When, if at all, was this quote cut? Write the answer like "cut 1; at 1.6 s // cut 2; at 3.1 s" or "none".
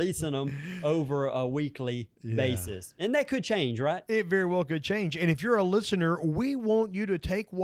cut 1; at 2.1 s